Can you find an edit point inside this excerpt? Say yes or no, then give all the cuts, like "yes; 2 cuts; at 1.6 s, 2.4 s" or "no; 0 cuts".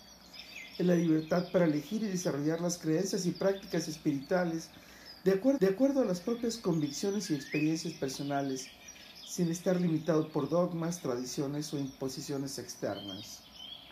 yes; 1 cut; at 5.6 s